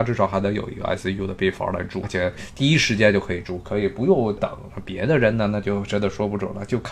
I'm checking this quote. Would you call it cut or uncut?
cut